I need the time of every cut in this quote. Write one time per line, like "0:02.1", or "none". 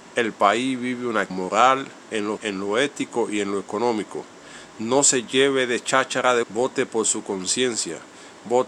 0:01.3
0:02.4
0:06.4